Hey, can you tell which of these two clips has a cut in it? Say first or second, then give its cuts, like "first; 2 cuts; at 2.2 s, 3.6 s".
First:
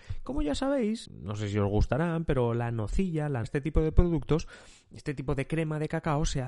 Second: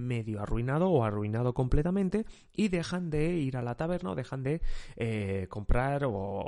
first; 2 cuts; at 1.1 s, 3.4 s